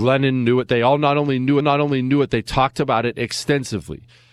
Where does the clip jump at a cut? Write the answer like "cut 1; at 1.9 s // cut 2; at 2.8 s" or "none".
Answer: cut 1; at 1.6 s